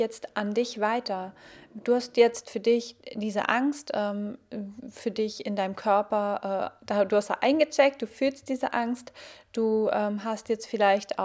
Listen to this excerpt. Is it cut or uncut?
uncut